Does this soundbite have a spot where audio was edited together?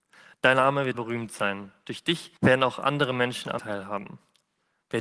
yes; 3 cuts; at 0.9 s, 2.4 s, 3.6 s

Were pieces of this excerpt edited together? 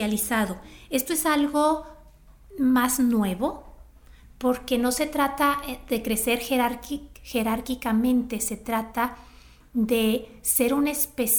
no; 0 cuts

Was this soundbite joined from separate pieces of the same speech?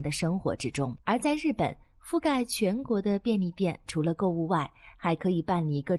yes; 1 cut; at 1.0 s

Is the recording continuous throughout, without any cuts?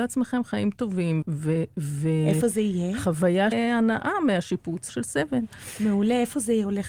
no; 3 cuts; at 1.2 s, 3.5 s, 4.9 s

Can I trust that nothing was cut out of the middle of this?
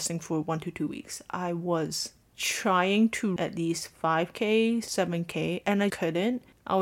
no; 2 cuts; at 3.4 s, 5.9 s

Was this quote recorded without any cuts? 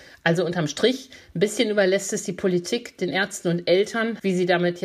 yes; 0 cuts

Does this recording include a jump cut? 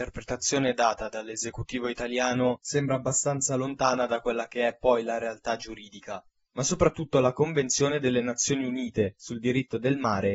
no; 0 cuts

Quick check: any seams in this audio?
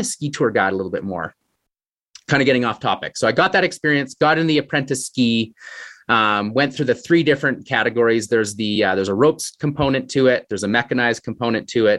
no; 0 cuts

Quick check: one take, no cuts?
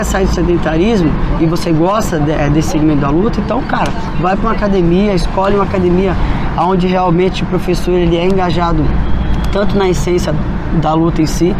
yes; 0 cuts

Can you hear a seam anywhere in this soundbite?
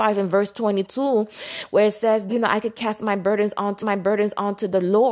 yes; 2 cuts; at 2.3 s, 3.8 s

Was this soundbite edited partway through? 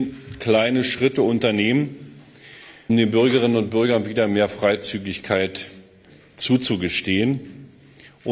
yes; 1 cut; at 2.9 s

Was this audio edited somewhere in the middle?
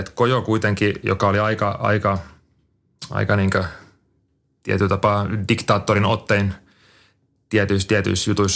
no; 0 cuts

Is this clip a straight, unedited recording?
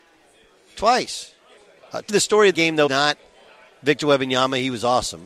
no; 4 cuts; at 1.6 s, 2.1 s, 2.5 s, 2.9 s

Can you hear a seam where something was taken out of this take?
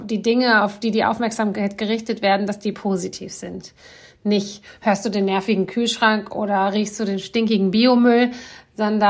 no; 0 cuts

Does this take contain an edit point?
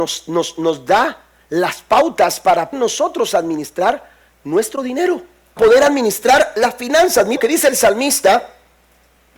yes; 3 cuts; at 2.7 s, 5.6 s, 7.4 s

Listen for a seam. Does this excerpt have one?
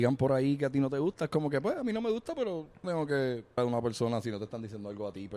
yes; 2 cuts; at 2.8 s, 3.6 s

